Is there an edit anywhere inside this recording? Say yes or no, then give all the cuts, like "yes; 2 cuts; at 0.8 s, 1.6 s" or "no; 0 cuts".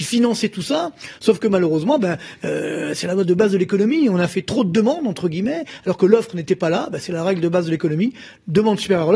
no; 0 cuts